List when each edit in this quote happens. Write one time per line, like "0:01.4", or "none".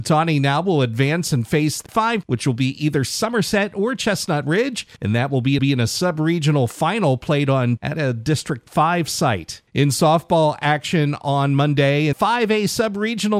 0:01.9
0:02.2
0:05.6
0:07.8
0:09.7
0:12.1